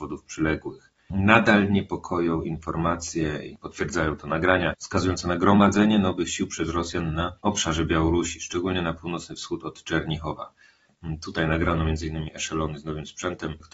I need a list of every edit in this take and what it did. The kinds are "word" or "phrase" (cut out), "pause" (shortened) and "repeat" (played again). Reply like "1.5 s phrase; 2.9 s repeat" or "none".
7.4 s pause